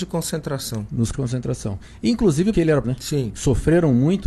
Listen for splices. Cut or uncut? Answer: cut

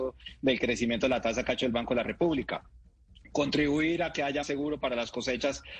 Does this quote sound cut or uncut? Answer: cut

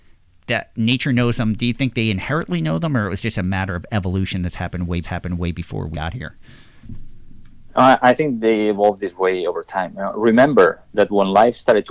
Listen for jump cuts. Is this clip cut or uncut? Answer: cut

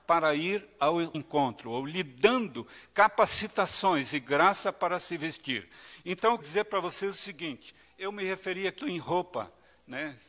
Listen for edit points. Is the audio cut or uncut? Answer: cut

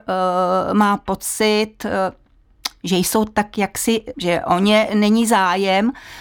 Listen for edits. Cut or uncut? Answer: cut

